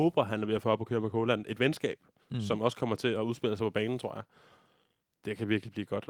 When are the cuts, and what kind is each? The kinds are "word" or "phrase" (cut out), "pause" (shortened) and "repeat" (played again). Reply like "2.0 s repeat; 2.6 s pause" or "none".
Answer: none